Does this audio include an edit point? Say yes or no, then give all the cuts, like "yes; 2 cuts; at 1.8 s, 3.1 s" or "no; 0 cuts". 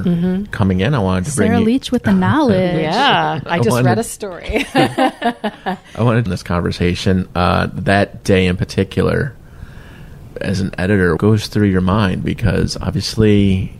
yes; 3 cuts; at 6.3 s, 10.3 s, 11.2 s